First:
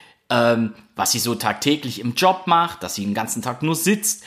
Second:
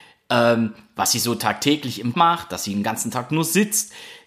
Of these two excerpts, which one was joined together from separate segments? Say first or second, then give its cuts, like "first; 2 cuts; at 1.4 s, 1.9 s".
second; 1 cut; at 2.1 s